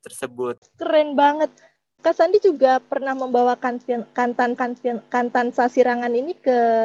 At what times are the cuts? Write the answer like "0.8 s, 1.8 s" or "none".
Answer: 2.0 s, 4.6 s